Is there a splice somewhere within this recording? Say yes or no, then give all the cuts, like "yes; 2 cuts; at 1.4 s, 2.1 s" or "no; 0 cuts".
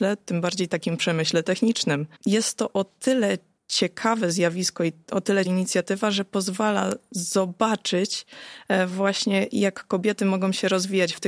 yes; 3 cuts; at 2.1 s, 3.6 s, 5.4 s